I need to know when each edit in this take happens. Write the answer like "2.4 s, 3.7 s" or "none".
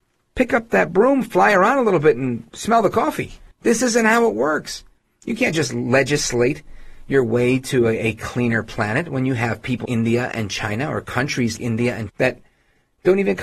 3.5 s, 5.0 s, 9.9 s, 11.6 s, 12.1 s